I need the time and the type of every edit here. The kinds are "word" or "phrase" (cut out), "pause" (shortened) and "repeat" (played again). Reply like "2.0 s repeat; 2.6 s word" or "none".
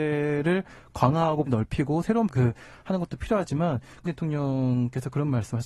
1.5 s word; 2.3 s word; 4.0 s word